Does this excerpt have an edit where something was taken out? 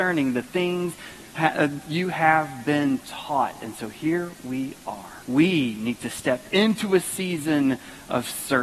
yes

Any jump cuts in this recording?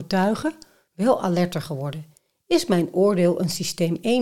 no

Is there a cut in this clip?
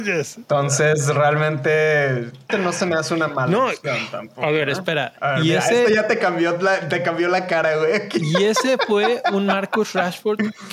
yes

